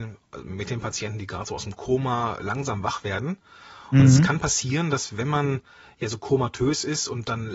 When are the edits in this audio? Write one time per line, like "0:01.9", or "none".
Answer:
none